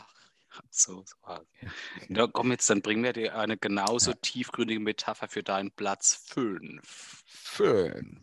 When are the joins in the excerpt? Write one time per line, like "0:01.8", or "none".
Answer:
none